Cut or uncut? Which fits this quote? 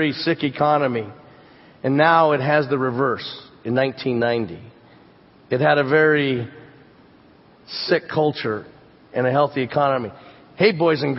uncut